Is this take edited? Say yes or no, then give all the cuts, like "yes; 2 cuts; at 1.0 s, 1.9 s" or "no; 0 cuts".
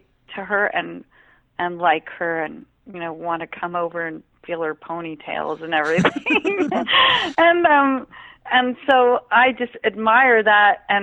no; 0 cuts